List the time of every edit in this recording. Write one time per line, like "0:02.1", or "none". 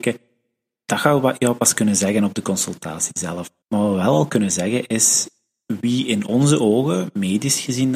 0:03.6